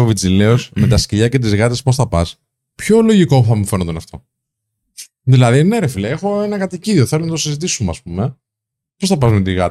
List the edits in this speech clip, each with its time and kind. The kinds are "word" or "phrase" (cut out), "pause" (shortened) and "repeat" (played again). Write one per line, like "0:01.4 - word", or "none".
none